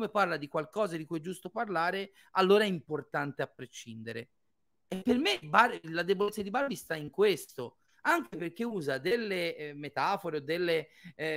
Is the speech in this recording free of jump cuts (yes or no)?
yes